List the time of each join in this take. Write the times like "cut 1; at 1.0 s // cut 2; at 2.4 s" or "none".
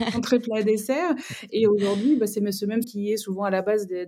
cut 1; at 2.8 s